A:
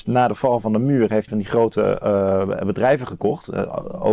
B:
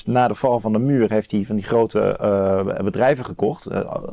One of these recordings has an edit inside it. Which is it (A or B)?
A